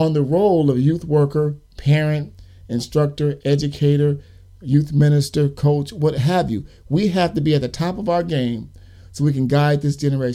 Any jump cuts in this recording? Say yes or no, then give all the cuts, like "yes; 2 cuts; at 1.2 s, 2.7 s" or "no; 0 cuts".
no; 0 cuts